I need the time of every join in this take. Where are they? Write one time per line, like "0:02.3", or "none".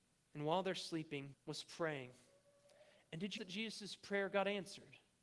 0:01.3
0:03.4